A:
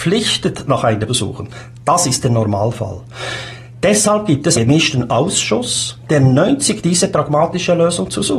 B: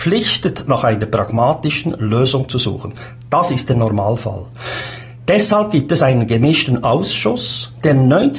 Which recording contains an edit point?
A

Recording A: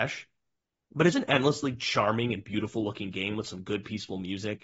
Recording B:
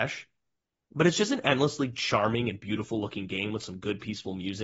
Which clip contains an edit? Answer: A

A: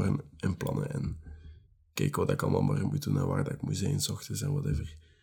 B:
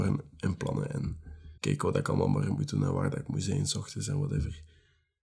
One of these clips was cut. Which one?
B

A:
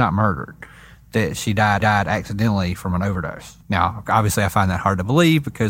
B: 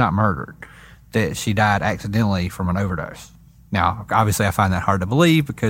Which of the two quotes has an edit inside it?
A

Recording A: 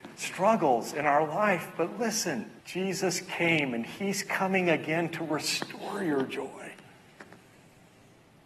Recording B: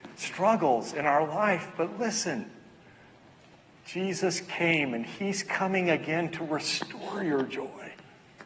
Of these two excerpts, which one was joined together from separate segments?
A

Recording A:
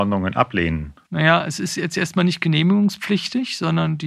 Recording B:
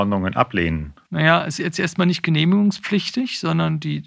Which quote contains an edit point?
B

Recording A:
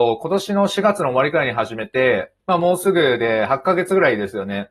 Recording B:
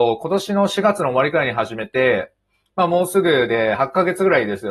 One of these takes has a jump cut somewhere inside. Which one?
A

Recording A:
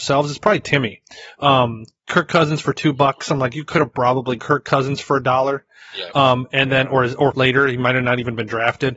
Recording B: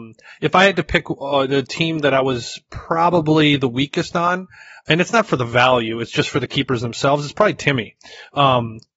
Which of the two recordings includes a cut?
A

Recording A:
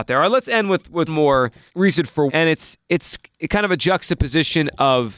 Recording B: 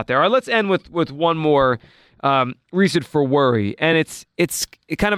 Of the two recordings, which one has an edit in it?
A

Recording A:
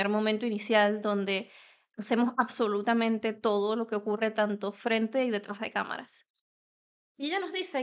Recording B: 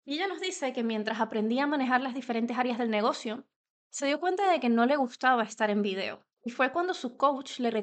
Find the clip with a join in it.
B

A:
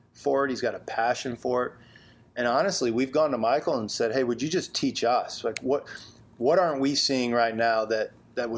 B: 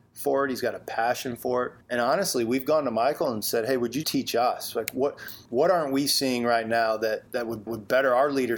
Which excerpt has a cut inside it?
B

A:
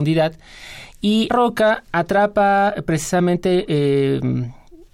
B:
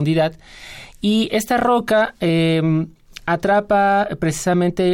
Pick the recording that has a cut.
A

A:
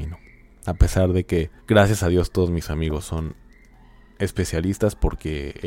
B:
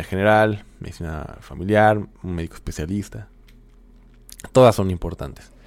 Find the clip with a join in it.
A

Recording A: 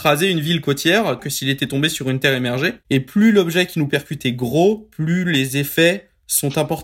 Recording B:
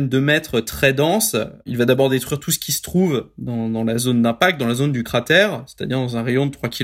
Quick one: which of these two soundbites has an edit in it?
A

